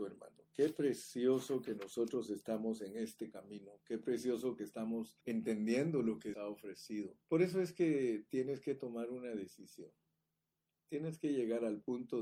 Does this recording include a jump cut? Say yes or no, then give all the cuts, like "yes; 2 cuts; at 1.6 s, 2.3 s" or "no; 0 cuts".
yes; 3 cuts; at 5.2 s, 6.3 s, 7.2 s